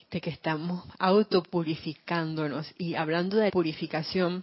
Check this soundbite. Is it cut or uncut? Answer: cut